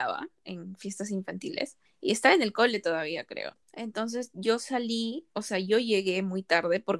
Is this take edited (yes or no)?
yes